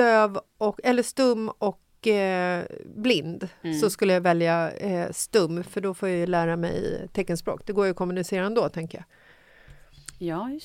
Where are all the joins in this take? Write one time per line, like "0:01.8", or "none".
none